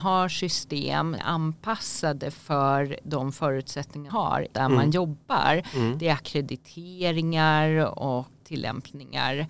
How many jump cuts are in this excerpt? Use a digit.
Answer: 4